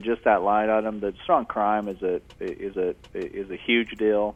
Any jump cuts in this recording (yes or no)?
yes